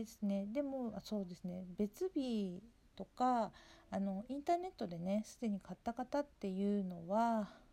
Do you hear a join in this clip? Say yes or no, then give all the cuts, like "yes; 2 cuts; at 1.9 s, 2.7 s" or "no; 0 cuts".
no; 0 cuts